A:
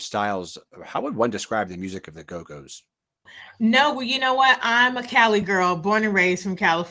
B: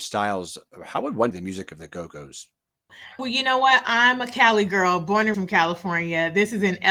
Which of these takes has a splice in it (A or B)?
B